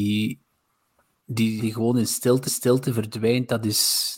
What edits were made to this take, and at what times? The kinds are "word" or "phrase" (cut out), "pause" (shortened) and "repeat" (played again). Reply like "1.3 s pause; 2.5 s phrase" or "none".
1.6 s word; 2.5 s repeat